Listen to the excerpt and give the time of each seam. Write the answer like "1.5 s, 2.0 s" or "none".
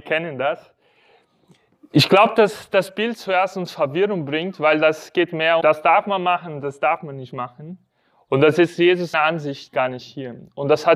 5.6 s, 9.1 s